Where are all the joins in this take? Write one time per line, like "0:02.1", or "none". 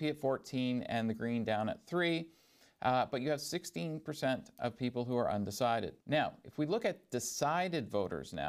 0:06.0